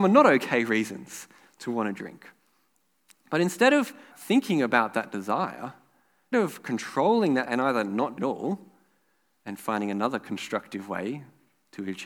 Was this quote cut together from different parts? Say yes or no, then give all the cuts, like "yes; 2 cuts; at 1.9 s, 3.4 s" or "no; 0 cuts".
yes; 4 cuts; at 4.1 s, 6.3 s, 7.5 s, 8.2 s